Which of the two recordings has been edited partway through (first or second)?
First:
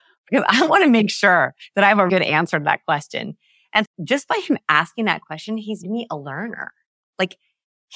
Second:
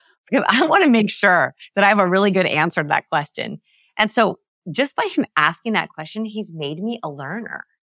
first